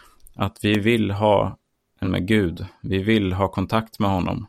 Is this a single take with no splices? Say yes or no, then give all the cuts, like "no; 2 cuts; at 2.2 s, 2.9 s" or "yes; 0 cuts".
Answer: no; 1 cut; at 2.0 s